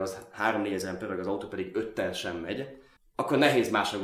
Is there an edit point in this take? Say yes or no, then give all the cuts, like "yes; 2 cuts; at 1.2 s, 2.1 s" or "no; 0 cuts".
yes; 1 cut; at 3.0 s